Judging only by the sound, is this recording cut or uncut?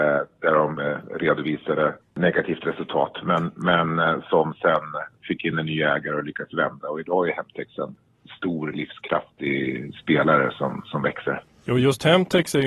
uncut